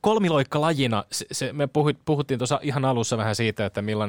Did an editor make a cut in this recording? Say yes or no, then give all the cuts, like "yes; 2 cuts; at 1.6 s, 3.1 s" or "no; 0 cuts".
no; 0 cuts